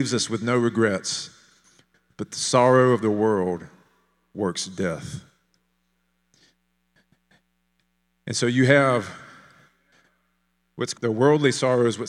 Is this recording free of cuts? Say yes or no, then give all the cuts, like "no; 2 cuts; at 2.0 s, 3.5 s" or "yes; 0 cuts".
no; 1 cut; at 10.9 s